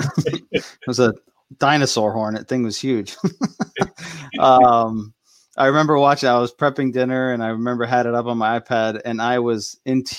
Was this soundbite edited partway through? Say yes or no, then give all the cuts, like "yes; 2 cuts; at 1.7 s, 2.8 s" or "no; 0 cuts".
no; 0 cuts